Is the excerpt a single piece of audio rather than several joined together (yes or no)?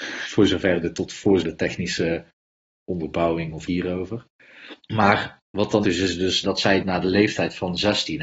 no